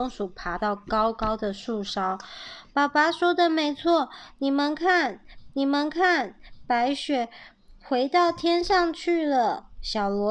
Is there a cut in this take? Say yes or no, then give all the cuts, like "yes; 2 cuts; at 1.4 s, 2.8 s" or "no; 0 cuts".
yes; 1 cut; at 5.5 s